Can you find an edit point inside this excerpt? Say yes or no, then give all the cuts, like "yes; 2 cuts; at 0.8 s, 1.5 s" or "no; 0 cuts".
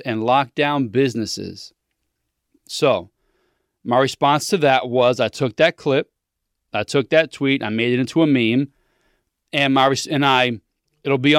no; 0 cuts